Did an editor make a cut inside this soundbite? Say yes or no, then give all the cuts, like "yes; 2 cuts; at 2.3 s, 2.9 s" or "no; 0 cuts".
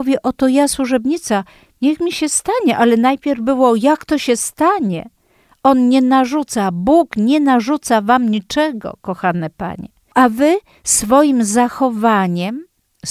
no; 0 cuts